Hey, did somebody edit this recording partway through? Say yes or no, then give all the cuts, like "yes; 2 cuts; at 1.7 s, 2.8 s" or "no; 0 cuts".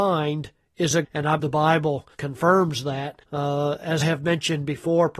yes; 5 cuts; at 1.0 s, 1.4 s, 2.1 s, 3.2 s, 4.0 s